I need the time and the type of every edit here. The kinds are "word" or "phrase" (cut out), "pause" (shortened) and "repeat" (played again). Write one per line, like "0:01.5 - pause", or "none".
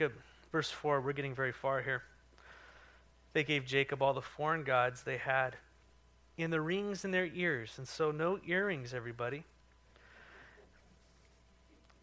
none